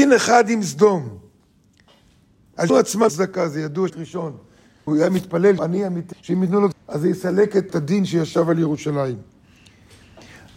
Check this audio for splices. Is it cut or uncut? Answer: cut